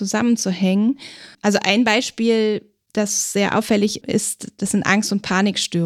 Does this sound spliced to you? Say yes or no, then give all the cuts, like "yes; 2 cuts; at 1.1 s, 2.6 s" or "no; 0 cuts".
yes; 1 cut; at 1.3 s